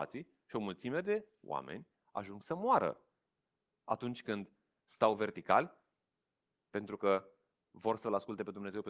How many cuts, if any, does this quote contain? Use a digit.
0